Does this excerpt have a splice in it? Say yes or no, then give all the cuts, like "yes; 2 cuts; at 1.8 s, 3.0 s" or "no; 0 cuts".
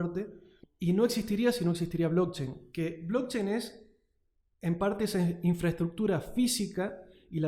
no; 0 cuts